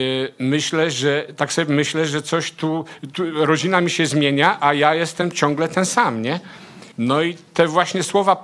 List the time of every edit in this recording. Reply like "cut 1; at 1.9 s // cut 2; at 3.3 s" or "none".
cut 1; at 6.9 s